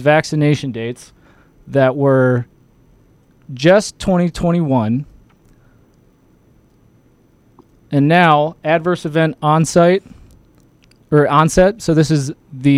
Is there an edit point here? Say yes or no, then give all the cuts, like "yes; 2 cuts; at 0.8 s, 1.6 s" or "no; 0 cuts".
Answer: no; 0 cuts